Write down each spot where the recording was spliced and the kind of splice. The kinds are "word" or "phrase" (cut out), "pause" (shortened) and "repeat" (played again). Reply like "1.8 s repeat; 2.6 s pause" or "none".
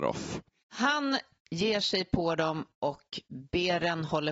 none